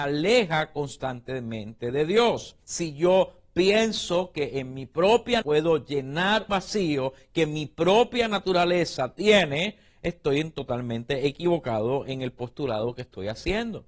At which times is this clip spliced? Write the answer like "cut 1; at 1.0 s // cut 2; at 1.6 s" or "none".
cut 1; at 2.6 s // cut 2; at 5.4 s // cut 3; at 6.5 s